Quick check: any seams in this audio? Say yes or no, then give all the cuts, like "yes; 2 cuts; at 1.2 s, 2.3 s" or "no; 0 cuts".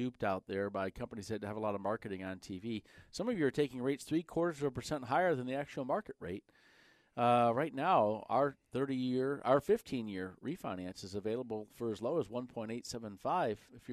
no; 0 cuts